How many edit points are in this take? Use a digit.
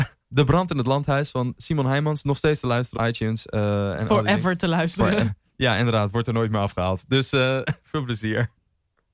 1